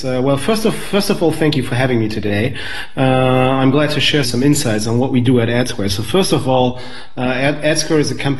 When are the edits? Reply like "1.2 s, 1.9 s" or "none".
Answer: 4.2 s